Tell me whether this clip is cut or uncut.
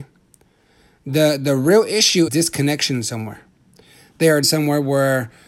cut